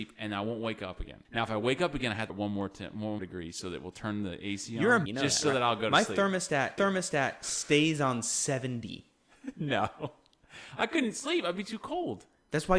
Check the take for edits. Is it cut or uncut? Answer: cut